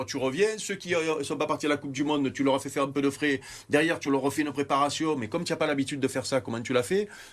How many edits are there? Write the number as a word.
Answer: zero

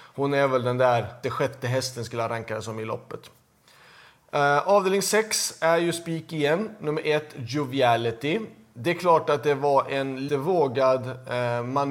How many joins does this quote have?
two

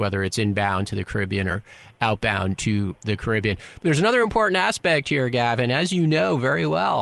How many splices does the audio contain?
zero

